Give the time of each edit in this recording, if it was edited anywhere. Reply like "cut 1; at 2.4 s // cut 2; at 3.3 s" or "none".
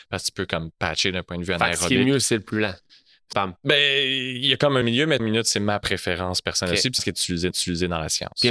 cut 1; at 3.3 s // cut 2; at 4.8 s // cut 3; at 5.2 s // cut 4; at 7.0 s // cut 5; at 7.5 s